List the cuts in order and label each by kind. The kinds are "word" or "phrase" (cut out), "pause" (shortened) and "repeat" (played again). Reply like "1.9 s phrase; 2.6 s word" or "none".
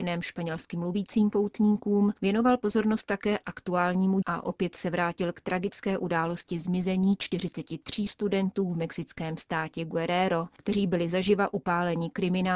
4.2 s word